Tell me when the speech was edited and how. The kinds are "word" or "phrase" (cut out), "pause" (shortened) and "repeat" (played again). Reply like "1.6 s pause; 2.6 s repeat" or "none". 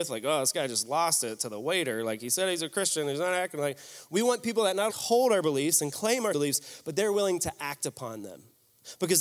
4.9 s word; 6.3 s word